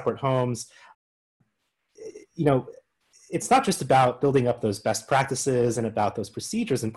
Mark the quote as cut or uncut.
uncut